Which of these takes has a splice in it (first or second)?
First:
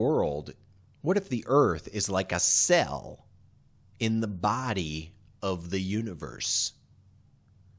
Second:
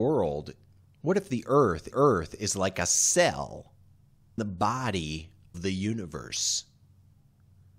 second